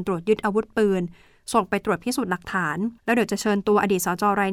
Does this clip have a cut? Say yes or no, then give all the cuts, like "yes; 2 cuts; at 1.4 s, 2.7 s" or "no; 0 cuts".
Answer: yes; 1 cut; at 3.0 s